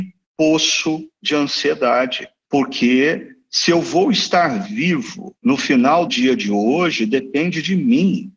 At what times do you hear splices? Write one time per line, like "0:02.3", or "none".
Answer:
0:05.4
0:06.1